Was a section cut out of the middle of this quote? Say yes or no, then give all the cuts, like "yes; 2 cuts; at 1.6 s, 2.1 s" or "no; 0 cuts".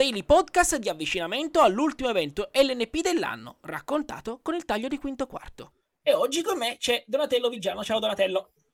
no; 0 cuts